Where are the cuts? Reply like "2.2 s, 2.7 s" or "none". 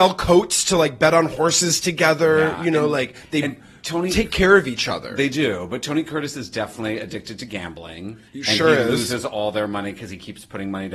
8.3 s